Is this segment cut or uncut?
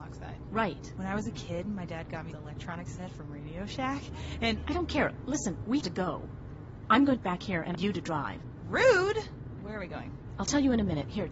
cut